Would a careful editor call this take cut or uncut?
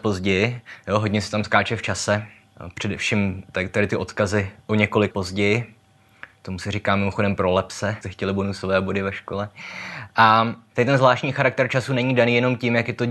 cut